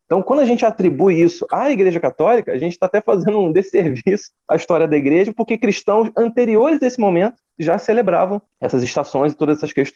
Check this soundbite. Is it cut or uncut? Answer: uncut